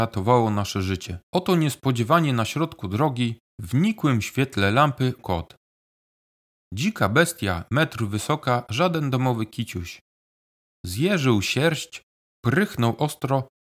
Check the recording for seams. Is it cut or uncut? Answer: cut